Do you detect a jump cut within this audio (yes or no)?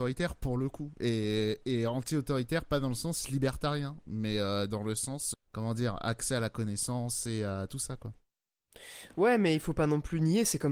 yes